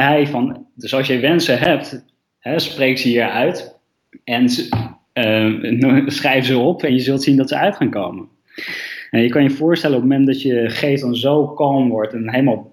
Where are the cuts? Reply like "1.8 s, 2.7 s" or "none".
2.2 s, 4.0 s